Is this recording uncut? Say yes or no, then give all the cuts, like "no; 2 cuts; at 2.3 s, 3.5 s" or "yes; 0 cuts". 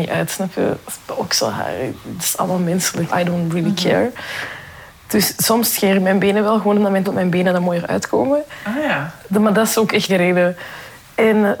no; 3 cuts; at 3.1 s, 7.0 s, 10.1 s